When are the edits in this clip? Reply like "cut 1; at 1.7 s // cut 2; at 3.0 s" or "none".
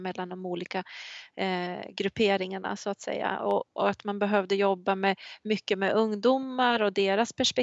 cut 1; at 3.7 s